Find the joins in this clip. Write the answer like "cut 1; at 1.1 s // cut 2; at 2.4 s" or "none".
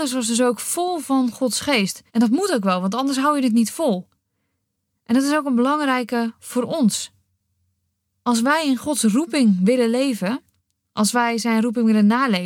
cut 1; at 2.1 s